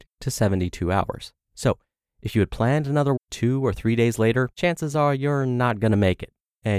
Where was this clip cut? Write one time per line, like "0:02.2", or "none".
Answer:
0:01.4
0:03.2
0:04.5